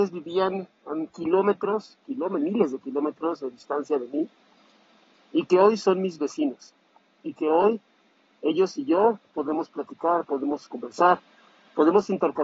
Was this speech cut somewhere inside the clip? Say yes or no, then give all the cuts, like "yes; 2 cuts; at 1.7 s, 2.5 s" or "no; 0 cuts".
no; 0 cuts